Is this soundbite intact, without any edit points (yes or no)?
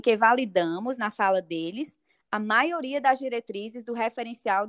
yes